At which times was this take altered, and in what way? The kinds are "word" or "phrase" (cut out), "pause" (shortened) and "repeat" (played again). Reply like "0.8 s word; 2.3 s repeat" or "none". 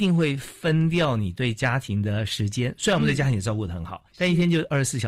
4.1 s pause